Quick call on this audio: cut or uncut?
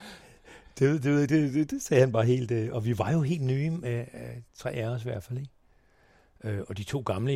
uncut